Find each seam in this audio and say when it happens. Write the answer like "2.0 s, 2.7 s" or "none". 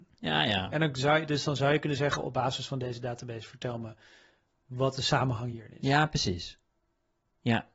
none